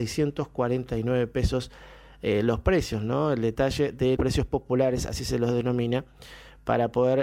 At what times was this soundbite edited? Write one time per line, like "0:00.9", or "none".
0:04.2